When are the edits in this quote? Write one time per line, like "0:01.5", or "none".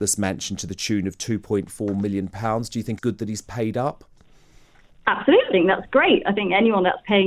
0:03.0
0:05.5